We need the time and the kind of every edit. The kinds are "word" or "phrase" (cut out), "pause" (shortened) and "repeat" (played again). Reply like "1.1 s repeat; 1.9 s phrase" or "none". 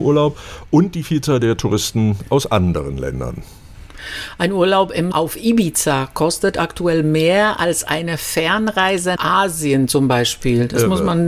5.1 s word; 9.2 s word

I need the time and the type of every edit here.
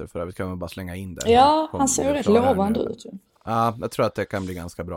none

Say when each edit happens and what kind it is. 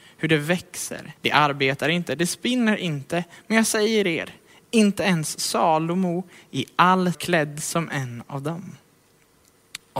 1.2 s pause; 7.1 s phrase

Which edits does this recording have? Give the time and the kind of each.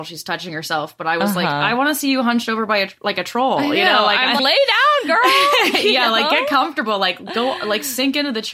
4.4 s word

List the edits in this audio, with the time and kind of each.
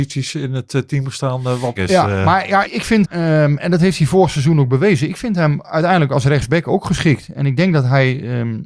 1.8 s word; 2.7 s word; 3.0 s word; 3.6 s word

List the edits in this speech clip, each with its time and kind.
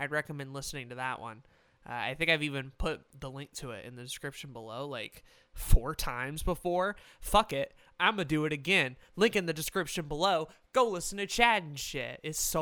none

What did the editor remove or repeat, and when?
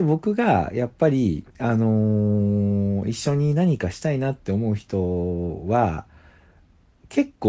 1.5 s pause

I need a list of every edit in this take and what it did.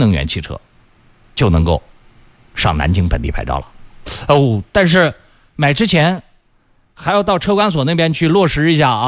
none

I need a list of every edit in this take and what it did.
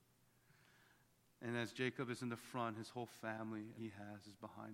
3.8 s word

